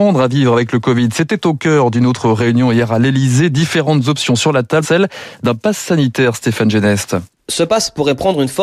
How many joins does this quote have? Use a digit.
1